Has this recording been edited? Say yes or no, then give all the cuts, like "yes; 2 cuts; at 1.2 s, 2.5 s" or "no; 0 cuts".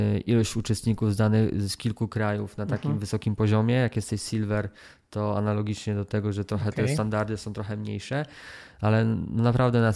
no; 0 cuts